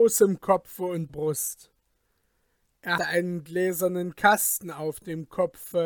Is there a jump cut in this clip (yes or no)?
yes